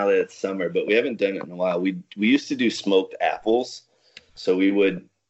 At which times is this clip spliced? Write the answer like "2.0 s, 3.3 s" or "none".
none